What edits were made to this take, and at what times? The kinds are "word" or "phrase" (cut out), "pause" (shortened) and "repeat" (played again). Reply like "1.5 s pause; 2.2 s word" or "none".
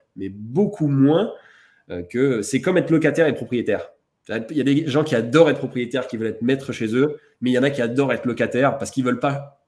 none